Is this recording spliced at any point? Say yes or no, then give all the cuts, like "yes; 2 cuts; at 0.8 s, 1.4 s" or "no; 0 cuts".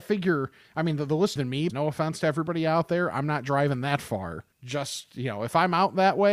yes; 3 cuts; at 1.4 s, 1.7 s, 4.5 s